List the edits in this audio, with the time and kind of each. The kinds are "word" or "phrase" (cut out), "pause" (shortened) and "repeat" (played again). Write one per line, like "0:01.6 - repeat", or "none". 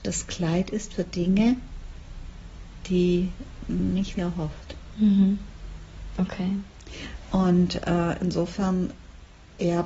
0:04.1 - phrase